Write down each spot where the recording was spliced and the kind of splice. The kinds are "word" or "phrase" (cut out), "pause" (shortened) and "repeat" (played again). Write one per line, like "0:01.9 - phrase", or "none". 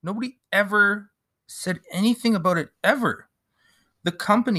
0:01.2 - pause